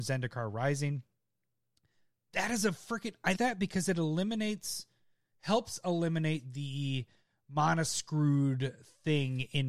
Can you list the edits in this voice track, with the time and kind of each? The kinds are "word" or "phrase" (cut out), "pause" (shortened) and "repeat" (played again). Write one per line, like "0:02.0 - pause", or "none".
0:03.3 - word